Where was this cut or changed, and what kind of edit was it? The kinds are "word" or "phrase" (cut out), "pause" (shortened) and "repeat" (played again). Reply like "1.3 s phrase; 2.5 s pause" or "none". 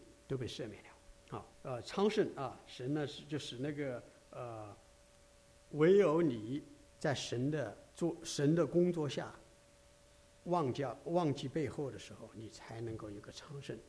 1.2 s pause; 6.8 s pause; 7.9 s pause